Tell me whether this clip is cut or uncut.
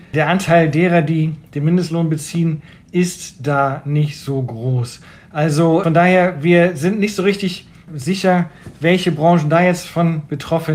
uncut